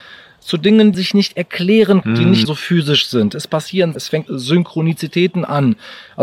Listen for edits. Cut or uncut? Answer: cut